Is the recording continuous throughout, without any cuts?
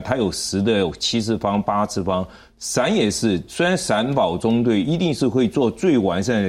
yes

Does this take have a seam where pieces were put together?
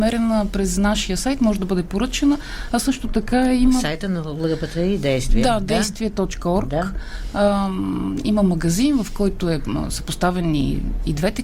no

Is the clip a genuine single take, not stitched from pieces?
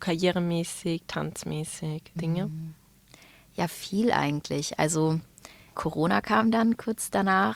no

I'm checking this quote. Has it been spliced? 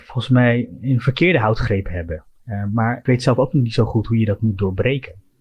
yes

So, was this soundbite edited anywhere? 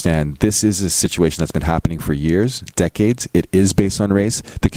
no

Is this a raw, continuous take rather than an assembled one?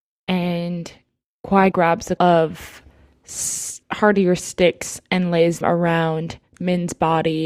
no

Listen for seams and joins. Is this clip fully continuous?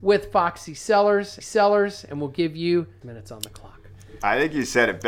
no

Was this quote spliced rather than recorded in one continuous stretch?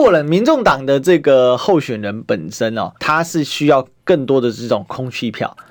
yes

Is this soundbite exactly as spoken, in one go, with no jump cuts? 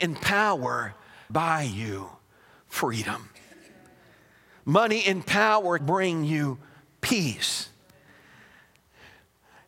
no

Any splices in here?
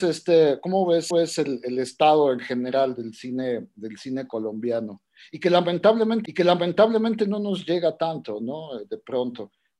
yes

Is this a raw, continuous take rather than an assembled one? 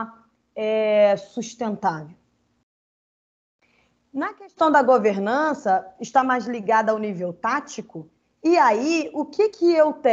yes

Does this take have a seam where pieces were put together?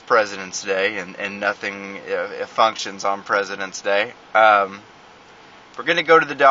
no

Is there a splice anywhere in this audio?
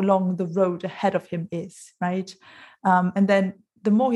no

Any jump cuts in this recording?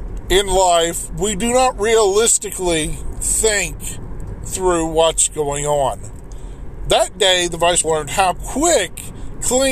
yes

